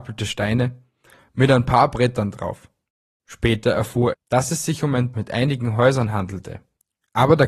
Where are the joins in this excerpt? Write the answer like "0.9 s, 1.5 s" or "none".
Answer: 4.1 s, 5.1 s